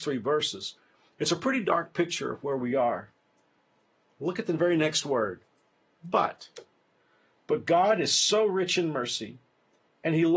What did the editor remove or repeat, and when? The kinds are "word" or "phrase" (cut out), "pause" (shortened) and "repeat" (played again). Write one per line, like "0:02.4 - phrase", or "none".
none